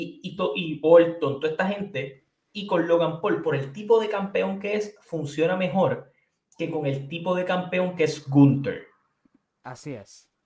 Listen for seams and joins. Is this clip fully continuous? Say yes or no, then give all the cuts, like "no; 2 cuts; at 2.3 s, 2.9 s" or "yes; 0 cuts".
yes; 0 cuts